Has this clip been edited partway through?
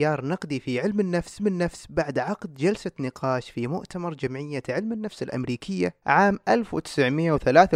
yes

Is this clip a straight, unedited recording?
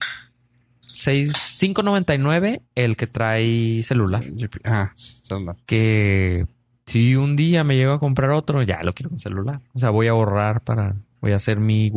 yes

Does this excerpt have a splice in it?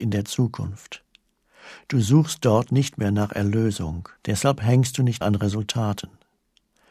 yes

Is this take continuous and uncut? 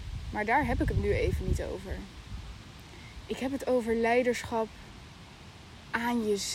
yes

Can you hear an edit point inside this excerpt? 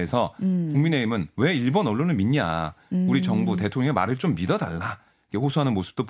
no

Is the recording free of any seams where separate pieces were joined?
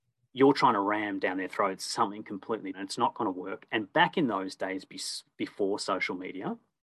no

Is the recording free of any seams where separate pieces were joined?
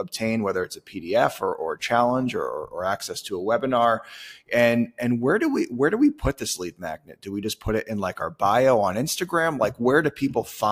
yes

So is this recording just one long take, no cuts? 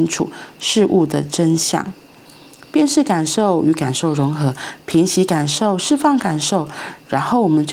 yes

